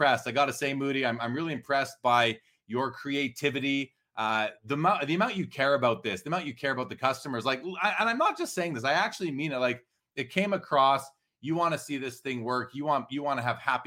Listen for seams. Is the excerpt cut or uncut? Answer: uncut